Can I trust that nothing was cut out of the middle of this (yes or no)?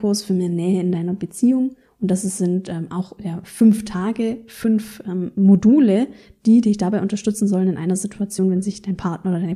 yes